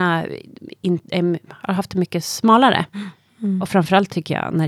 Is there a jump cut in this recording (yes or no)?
no